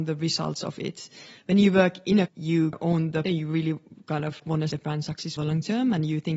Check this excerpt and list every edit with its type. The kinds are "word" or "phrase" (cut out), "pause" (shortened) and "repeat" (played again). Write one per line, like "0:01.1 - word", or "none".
0:02.3 - word
0:02.7 - word
0:03.2 - word
0:04.4 - word
0:04.7 - word
0:05.4 - word